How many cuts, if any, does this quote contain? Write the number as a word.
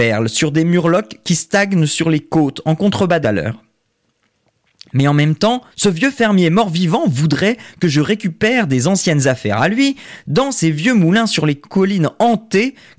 two